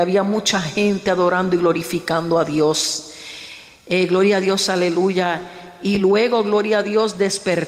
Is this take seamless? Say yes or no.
yes